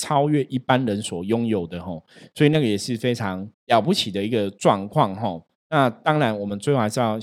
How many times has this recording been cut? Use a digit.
1